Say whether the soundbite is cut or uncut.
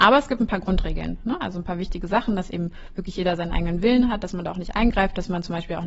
uncut